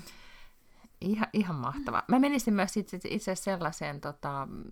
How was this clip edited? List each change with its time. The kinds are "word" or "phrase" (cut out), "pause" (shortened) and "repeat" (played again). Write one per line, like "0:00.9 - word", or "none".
none